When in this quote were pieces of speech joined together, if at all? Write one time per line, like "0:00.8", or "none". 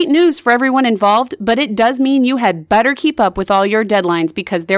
none